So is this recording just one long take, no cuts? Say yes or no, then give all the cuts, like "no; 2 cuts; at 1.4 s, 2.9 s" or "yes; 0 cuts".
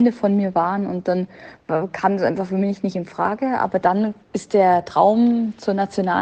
yes; 0 cuts